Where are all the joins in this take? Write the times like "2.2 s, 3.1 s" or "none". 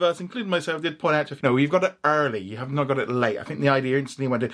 1.4 s

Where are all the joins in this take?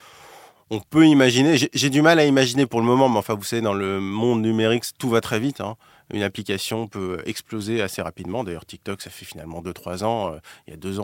none

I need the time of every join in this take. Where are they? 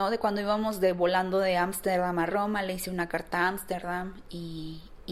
none

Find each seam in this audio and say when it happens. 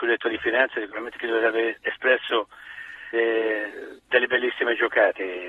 3.1 s, 4.0 s

